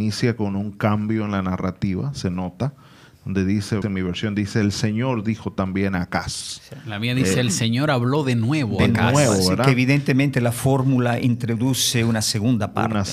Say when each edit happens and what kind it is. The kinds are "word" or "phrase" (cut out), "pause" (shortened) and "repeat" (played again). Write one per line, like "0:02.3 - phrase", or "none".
0:03.8 - word

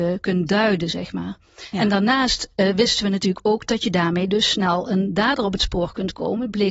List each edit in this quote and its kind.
none

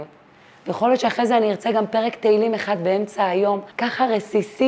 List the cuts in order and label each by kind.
0:03.7 - pause

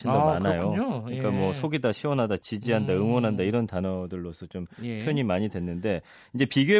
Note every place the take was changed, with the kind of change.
none

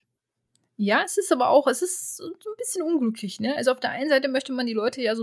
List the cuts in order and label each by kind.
none

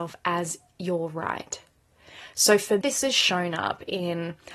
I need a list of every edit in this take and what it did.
0:02.8 - word

